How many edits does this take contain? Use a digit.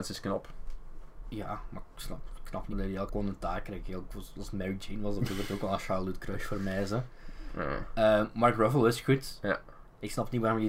2